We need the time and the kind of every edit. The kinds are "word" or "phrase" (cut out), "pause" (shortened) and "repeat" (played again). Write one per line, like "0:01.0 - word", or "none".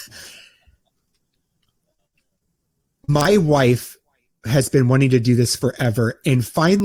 none